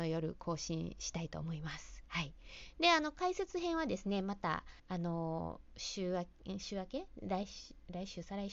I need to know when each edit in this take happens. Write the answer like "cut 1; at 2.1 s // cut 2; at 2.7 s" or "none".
cut 1; at 4.8 s